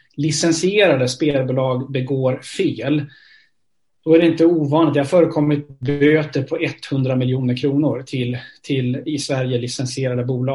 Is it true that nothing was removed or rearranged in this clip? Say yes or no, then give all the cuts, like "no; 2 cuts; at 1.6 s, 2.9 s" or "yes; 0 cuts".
yes; 0 cuts